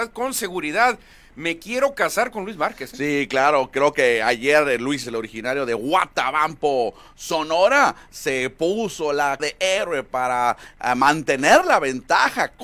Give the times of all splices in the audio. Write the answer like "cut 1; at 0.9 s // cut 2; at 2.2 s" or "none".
cut 1; at 5.0 s // cut 2; at 9.4 s

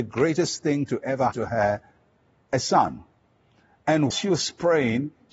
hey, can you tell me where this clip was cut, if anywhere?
cut 1; at 1.3 s // cut 2; at 4.1 s

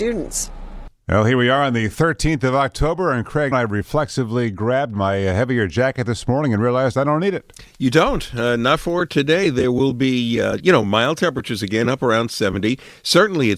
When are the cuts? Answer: cut 1; at 3.5 s

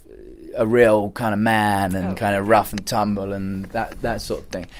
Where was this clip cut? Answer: none

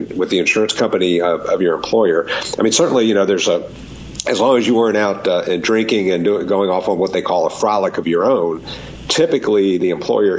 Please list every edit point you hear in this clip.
none

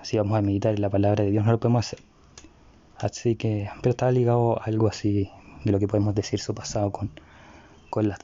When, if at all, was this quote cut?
none

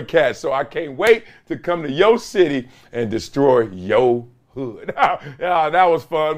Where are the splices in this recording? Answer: none

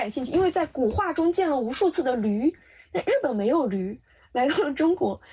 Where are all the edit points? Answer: none

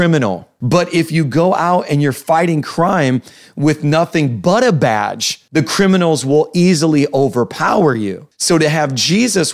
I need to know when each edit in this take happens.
none

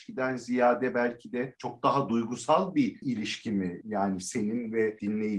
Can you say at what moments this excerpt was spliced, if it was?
none

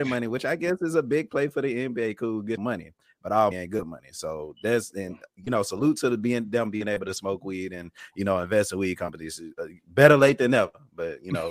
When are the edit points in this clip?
cut 1; at 2.6 s // cut 2; at 3.5 s

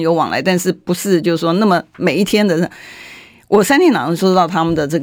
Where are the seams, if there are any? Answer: none

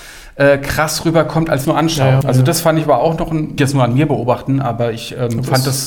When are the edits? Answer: cut 1; at 1.6 s // cut 2; at 2.2 s // cut 3; at 3.6 s

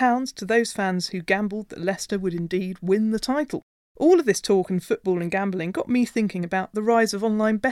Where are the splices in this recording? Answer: none

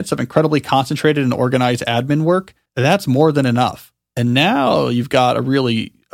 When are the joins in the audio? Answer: cut 1; at 2.7 s

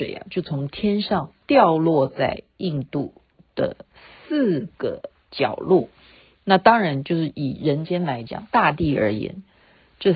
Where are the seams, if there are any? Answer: none

